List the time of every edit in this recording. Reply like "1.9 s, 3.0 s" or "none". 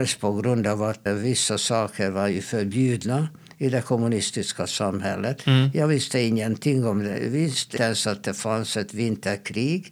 1.1 s, 7.8 s